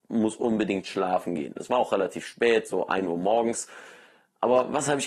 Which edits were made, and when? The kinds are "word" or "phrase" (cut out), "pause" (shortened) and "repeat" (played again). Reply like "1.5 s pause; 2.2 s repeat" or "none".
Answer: none